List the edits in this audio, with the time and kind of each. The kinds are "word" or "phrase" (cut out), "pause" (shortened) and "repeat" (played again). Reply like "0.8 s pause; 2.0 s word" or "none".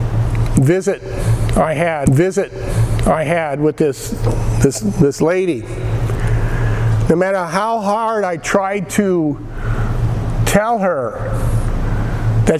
2.1 s repeat

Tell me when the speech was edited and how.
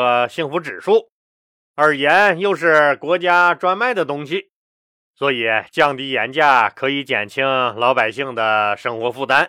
none

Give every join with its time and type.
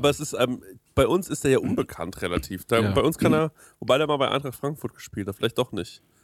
none

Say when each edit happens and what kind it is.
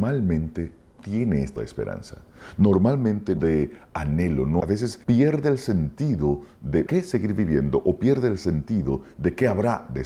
1.0 s word; 1.6 s word; 3.4 s phrase; 4.6 s word; 5.0 s pause; 6.9 s word

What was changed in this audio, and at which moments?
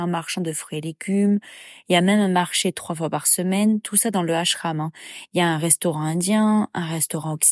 none

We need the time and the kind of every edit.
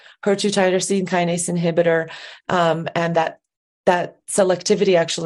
none

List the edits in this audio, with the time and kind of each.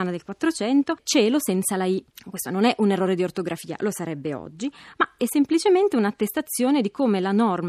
none

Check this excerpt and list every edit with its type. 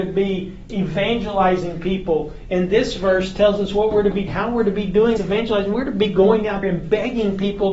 4.3 s word; 5.2 s word; 6.6 s word

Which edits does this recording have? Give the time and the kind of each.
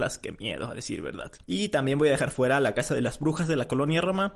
1.4 s pause

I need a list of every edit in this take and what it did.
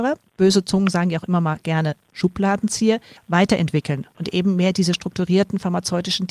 none

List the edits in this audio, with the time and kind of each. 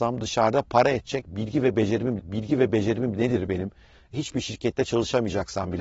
2.2 s repeat

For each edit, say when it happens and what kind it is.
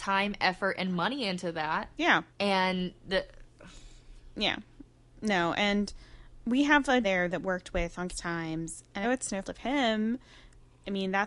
2.3 s pause; 7.0 s word; 7.4 s word; 8.1 s word; 9.0 s word; 9.4 s word

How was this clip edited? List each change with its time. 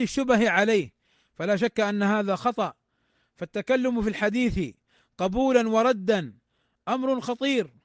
none

